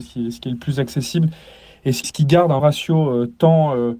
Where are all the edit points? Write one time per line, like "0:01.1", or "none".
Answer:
0:02.0
0:02.6